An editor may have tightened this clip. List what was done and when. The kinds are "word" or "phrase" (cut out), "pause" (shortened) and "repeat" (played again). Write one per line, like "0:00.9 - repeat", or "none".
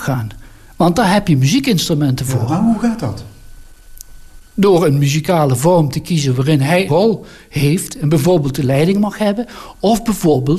0:06.9 - word